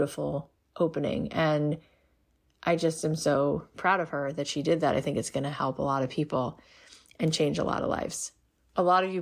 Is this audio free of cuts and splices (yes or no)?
yes